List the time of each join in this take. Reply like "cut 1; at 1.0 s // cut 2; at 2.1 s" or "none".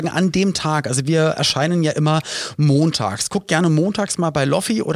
none